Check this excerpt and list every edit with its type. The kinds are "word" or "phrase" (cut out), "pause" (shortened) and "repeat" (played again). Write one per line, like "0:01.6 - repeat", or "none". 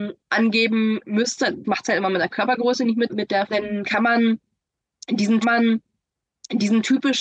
0:01.6 - phrase
0:03.1 - word
0:03.5 - phrase
0:05.4 - repeat

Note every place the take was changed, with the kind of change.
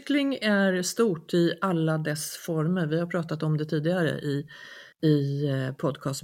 0:04.9 - pause

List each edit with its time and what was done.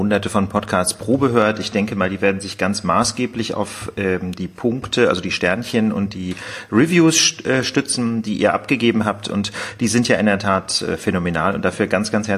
none

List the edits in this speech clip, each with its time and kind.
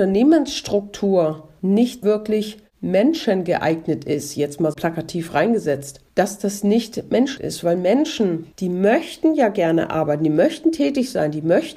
0:02.0 - word
0:04.7 - word
0:06.1 - pause
0:07.4 - word
0:08.5 - pause

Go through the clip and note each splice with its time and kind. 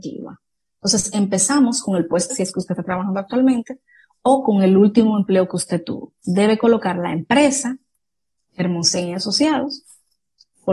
0:02.3 - word

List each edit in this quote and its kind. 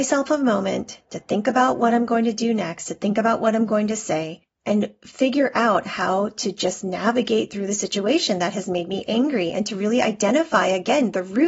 none

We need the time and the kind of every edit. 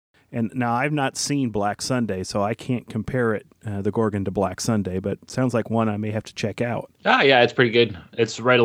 0:07.0 - pause

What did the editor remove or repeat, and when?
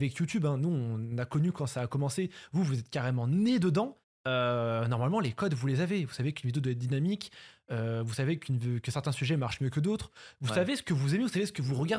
0:04.0 - pause

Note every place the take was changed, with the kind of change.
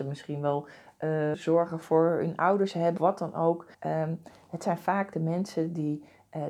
0:01.3 - word
0:01.8 - word
0:03.0 - word
0:03.7 - pause

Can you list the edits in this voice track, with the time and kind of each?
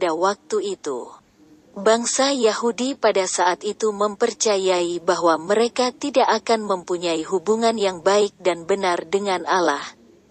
none

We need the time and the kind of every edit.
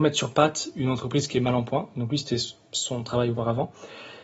none

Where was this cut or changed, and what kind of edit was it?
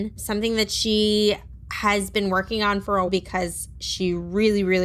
0:03.1 - word

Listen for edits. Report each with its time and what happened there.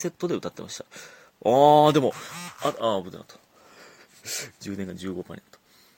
0:01.3 - pause

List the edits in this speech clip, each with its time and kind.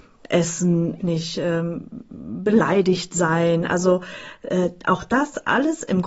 0:01.0 - phrase

